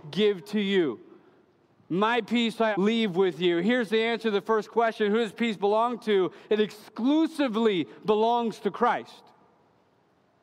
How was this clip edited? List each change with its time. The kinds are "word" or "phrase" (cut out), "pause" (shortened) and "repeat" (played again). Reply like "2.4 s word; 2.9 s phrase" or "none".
2.7 s word